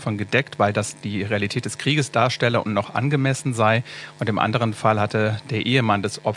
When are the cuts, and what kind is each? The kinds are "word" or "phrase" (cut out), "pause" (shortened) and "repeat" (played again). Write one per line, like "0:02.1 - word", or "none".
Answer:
none